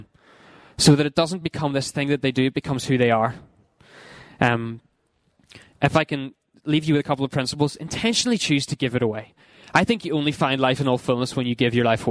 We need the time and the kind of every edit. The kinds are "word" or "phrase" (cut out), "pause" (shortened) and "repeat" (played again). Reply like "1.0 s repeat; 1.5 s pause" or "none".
none